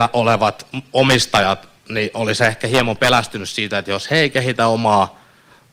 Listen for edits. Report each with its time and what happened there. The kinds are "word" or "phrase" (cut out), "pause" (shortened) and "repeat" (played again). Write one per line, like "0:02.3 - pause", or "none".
0:01.8 - pause